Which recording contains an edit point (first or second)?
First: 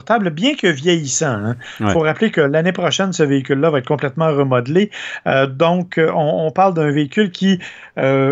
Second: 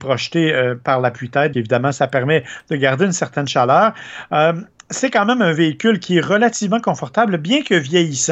second